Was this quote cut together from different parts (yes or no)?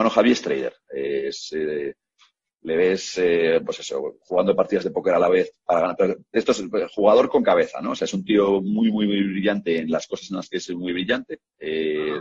no